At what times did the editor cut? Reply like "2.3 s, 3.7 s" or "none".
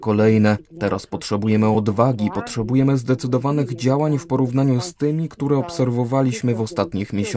none